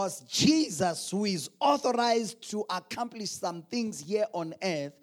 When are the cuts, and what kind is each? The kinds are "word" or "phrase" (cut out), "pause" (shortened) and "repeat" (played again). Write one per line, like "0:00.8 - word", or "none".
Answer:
none